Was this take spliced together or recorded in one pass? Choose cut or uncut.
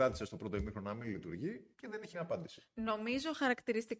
cut